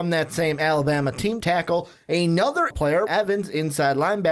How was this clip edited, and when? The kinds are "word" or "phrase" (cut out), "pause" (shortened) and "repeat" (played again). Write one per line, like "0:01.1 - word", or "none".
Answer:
0:01.4 - word
0:02.7 - word
0:03.1 - word